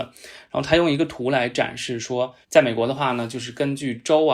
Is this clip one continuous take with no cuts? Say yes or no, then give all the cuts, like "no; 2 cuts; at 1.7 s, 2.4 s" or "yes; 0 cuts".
no; 1 cut; at 2.4 s